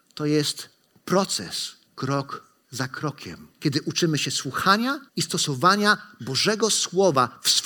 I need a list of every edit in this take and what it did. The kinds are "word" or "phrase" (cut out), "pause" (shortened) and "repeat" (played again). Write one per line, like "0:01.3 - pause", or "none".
0:01.9 - pause
0:03.5 - pause
0:05.1 - pause

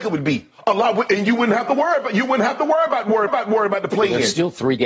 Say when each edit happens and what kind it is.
0:03.3 - repeat

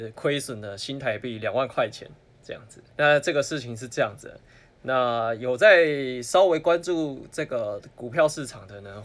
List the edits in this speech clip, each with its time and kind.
0:02.9 - pause

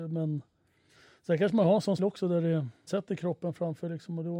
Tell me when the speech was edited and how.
0:02.0 - word
0:02.9 - word

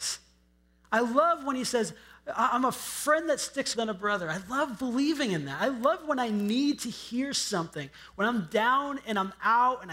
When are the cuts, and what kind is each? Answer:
0:03.7 - word

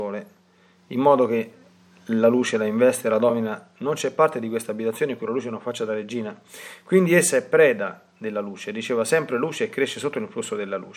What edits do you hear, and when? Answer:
none

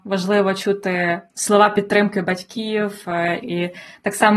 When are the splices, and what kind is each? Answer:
0:01.3 - pause
0:03.4 - phrase

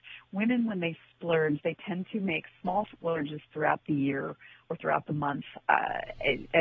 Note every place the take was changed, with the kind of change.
0:05.6 - word

